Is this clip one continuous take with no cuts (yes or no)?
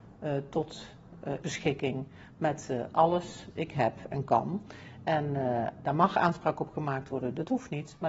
no